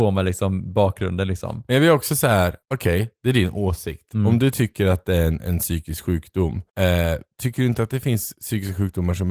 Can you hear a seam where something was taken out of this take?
yes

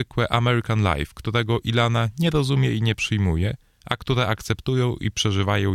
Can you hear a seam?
no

